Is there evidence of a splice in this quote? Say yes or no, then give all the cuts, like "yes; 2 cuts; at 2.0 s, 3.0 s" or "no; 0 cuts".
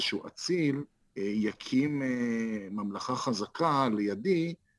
yes; 1 cut; at 1.0 s